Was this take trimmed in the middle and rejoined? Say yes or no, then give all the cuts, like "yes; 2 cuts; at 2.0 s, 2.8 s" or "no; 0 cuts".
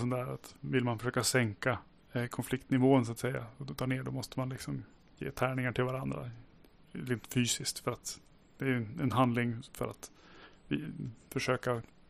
no; 0 cuts